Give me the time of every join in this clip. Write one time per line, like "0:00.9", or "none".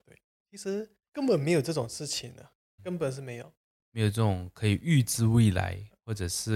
0:01.1
0:02.8